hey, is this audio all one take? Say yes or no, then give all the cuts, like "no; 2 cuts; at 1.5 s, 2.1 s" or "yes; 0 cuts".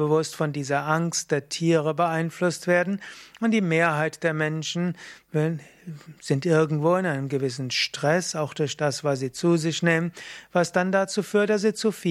yes; 0 cuts